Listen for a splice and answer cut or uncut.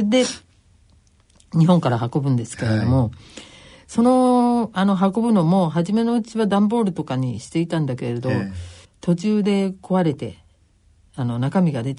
uncut